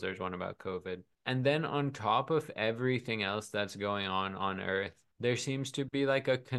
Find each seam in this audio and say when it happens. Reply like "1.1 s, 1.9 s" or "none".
1.1 s, 5.1 s